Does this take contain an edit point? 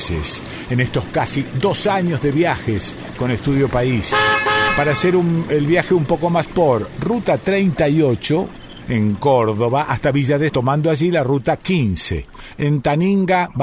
yes; 2 cuts; at 6.4 s, 10.5 s

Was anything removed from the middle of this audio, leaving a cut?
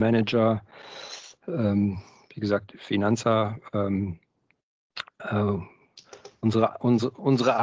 no; 0 cuts

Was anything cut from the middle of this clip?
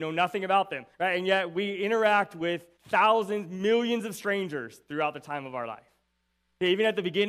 yes; 2 cuts; at 0.9 s, 2.8 s

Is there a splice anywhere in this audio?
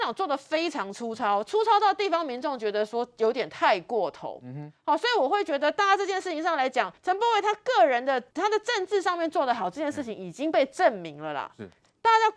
yes; 2 cuts; at 7.0 s, 8.3 s

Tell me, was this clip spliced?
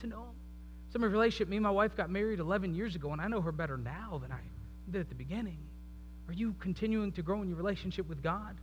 no; 0 cuts

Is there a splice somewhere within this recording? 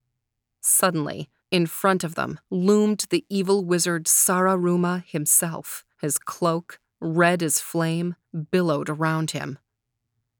yes; 4 cuts; at 1.4 s, 2.4 s, 5.9 s, 8.2 s

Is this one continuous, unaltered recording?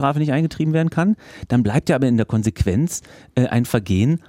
yes; 0 cuts

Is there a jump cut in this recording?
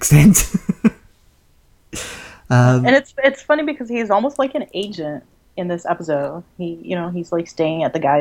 no; 0 cuts

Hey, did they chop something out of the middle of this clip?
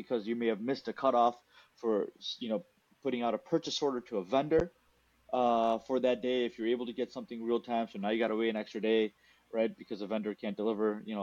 no; 0 cuts

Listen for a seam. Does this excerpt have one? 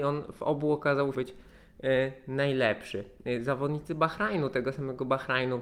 yes; 1 cut; at 1.1 s

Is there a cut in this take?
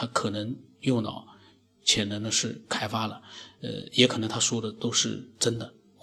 no; 0 cuts

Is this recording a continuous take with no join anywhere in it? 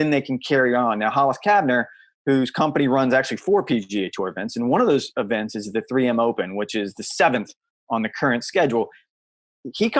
yes; 0 cuts

